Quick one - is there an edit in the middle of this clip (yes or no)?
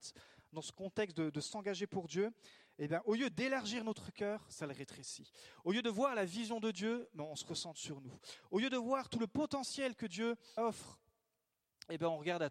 yes